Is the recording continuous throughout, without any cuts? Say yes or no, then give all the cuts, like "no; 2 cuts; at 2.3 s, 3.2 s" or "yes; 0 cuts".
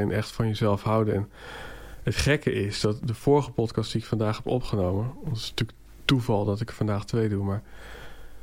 yes; 0 cuts